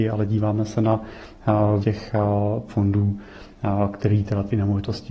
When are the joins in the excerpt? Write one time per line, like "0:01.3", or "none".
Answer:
0:01.8
0:02.7